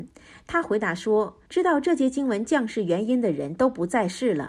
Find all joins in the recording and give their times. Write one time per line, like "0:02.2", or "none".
0:01.5